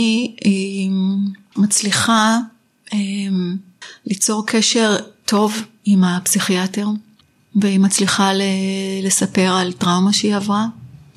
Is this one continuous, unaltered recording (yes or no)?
yes